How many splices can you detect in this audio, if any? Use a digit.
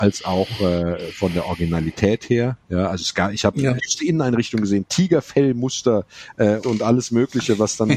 2